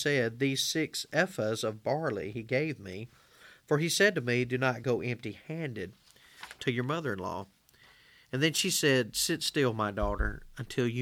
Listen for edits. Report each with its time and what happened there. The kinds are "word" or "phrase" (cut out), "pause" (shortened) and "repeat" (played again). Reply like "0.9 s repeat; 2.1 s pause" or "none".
none